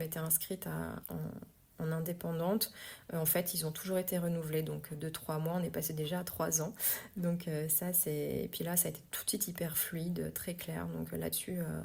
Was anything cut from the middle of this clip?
yes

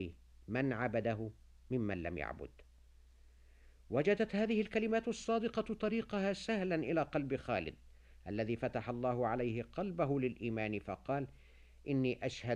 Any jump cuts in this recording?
no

